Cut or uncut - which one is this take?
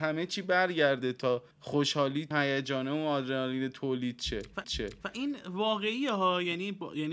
cut